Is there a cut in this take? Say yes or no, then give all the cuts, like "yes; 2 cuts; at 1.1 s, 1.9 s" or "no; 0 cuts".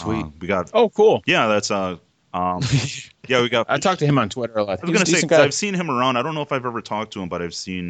no; 0 cuts